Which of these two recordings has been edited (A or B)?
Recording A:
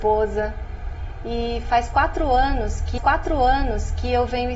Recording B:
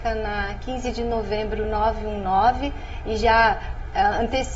A